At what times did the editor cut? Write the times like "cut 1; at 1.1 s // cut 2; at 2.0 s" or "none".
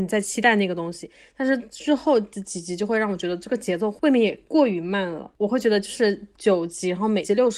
none